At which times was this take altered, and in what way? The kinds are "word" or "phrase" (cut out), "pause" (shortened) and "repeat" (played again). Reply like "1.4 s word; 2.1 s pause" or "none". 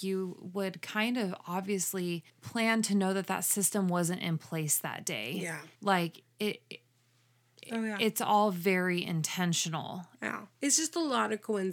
2.3 s pause; 5.7 s pause; 10.5 s pause